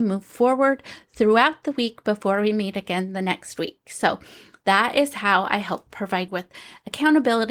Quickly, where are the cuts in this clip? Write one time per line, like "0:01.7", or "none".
0:06.3